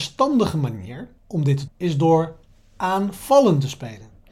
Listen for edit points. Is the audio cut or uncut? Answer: cut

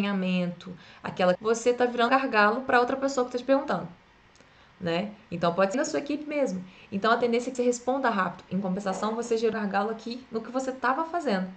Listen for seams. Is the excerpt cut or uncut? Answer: cut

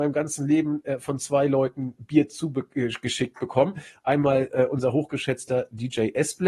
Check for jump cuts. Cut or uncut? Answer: cut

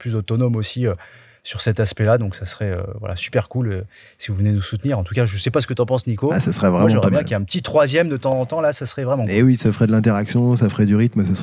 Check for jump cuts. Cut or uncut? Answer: uncut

